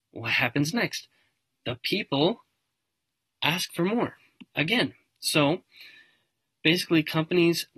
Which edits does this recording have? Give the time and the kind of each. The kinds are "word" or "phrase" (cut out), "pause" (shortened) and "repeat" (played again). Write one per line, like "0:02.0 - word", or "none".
none